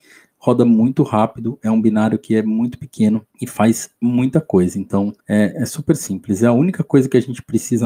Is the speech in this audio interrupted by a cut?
yes; 2 cuts; at 3.3 s, 5.2 s

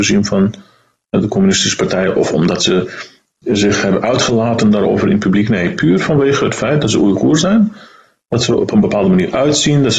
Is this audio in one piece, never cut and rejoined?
no; 1 cut; at 8.5 s

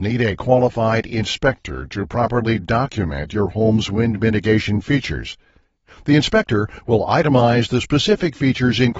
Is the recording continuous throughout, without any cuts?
yes; 0 cuts

